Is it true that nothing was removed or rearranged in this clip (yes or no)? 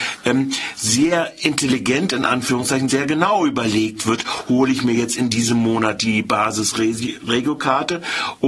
no